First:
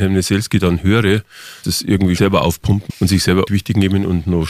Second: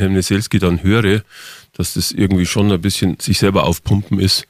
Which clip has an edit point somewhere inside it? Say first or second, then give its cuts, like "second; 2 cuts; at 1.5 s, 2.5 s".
first; 4 cuts; at 1.6 s, 2.2 s, 2.9 s, 3.5 s